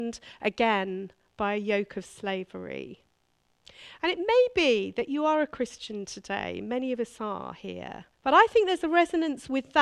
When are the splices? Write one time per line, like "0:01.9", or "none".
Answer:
0:08.1